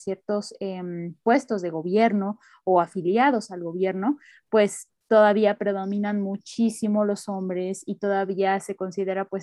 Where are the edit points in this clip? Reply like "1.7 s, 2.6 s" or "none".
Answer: 5.0 s